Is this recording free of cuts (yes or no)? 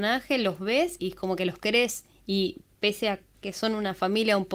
no